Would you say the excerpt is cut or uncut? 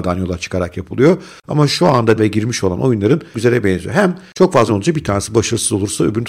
cut